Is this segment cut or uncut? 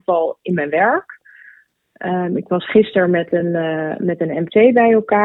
uncut